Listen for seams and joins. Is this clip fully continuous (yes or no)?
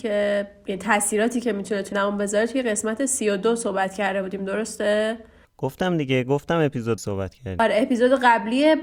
no